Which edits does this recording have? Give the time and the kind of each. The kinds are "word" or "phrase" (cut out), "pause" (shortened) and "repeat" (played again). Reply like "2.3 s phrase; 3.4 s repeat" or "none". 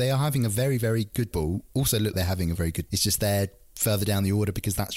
1.3 s phrase; 2.1 s word; 2.6 s word; 2.9 s word